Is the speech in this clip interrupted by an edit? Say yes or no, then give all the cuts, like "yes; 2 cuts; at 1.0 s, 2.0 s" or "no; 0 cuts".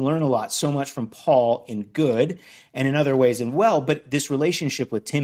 no; 0 cuts